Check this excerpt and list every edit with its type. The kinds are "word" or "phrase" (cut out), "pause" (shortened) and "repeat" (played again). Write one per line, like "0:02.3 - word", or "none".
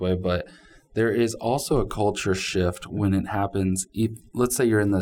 none